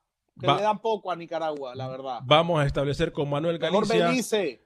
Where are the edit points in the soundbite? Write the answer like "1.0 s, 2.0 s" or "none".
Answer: 3.1 s